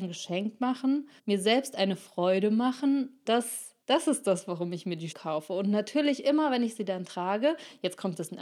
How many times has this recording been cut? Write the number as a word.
four